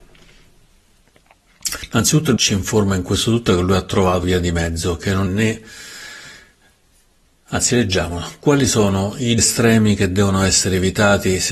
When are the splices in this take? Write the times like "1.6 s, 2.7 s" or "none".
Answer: 2.4 s, 4.2 s, 5.3 s, 9.4 s